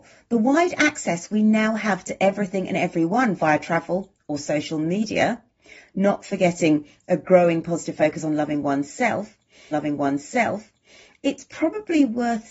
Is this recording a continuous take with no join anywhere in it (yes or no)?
no